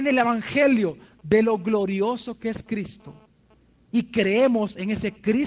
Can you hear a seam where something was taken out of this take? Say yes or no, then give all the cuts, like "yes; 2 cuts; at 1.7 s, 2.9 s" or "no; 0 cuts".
no; 0 cuts